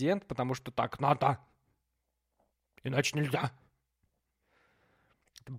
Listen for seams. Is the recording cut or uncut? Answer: uncut